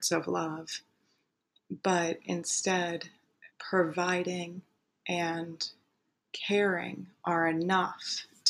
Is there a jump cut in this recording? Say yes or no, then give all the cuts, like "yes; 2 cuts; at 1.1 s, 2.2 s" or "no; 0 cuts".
yes; 1 cut; at 3.5 s